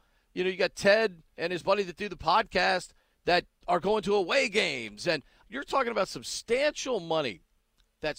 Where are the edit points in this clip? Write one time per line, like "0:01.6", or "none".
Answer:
0:05.4